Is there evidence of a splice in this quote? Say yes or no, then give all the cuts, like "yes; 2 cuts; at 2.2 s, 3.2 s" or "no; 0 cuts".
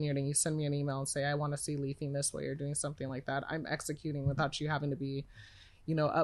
no; 0 cuts